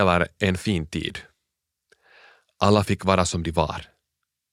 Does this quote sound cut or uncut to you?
uncut